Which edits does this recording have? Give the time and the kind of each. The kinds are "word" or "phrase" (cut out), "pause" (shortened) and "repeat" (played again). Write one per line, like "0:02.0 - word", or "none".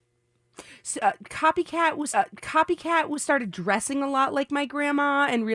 0:02.1 - repeat